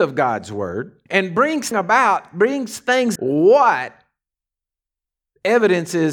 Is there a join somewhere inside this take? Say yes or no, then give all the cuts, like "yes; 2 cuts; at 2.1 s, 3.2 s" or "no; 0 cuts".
yes; 3 cuts; at 1.1 s, 1.7 s, 3.2 s